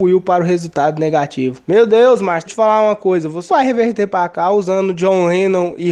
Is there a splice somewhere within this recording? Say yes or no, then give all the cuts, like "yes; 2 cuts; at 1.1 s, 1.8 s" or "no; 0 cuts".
yes; 2 cuts; at 2.5 s, 3.5 s